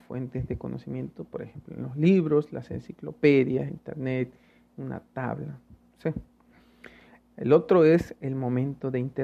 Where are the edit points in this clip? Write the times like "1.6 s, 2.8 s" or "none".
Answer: 3.7 s